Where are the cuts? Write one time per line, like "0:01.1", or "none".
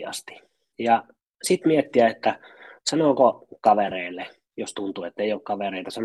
none